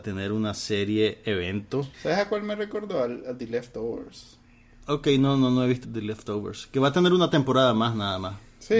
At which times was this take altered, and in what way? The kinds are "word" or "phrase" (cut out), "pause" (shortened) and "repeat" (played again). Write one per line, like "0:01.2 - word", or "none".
0:01.9 - pause
0:05.8 - phrase